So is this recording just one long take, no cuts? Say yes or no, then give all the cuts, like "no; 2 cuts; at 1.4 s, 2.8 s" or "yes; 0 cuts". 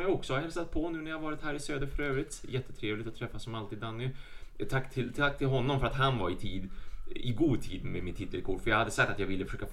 yes; 0 cuts